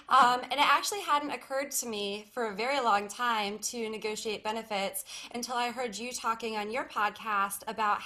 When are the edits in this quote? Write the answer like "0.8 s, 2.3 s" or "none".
none